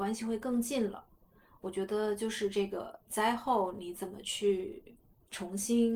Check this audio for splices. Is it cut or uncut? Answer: cut